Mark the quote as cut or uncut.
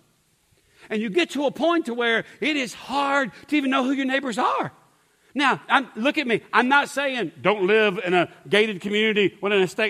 uncut